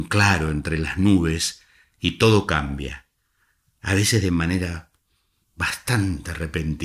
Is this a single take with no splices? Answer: yes; 0 cuts

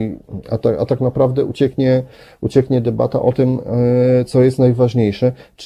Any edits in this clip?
no; 0 cuts

